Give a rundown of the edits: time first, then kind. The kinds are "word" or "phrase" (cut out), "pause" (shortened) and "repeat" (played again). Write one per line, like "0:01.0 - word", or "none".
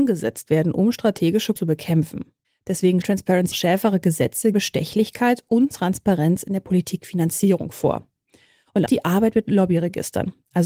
0:01.6 - word
0:03.0 - word
0:03.5 - word
0:04.5 - word
0:05.7 - word
0:08.9 - word

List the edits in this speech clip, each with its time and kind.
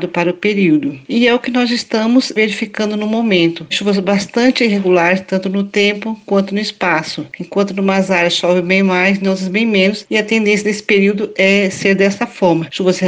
none

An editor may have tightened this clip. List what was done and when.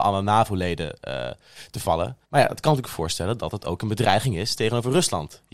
0:02.2 - pause

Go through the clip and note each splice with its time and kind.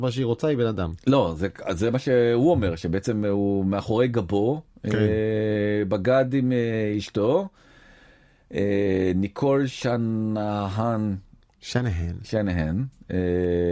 none

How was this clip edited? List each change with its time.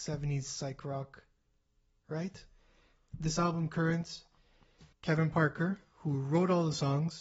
0:04.9 - pause

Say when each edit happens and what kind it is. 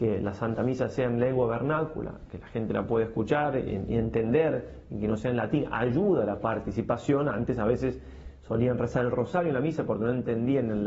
none

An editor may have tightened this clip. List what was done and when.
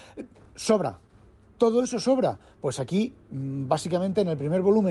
none

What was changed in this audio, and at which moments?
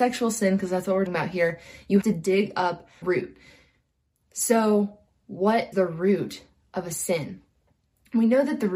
0:01.1 - word
0:02.0 - word
0:03.0 - word
0:05.7 - word

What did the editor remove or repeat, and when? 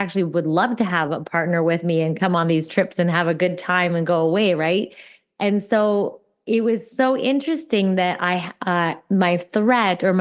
none

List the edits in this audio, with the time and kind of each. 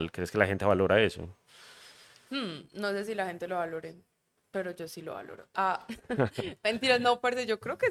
none

